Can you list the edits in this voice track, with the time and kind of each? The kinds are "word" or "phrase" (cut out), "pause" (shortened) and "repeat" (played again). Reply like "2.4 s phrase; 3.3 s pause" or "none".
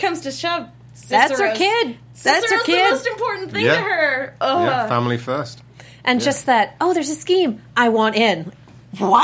none